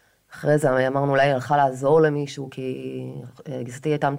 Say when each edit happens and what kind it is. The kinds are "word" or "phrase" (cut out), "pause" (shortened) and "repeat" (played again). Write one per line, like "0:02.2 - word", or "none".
none